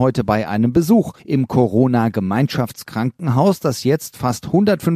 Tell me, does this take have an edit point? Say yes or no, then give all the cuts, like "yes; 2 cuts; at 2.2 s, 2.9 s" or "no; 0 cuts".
yes; 1 cut; at 1.2 s